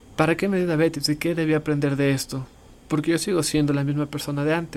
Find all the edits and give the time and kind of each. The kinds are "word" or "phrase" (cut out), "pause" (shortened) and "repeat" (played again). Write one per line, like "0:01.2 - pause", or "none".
none